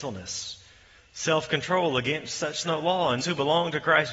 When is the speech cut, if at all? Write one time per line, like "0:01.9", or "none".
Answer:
0:02.6
0:03.2